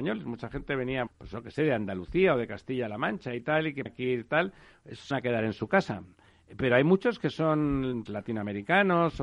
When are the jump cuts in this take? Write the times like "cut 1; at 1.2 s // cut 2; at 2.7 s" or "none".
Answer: cut 1; at 1.1 s // cut 2; at 3.9 s // cut 3; at 5.1 s // cut 4; at 8.1 s